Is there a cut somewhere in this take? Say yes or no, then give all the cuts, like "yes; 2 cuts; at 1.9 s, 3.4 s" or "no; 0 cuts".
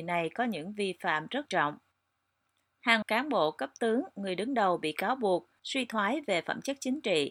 yes; 2 cuts; at 1.5 s, 3.0 s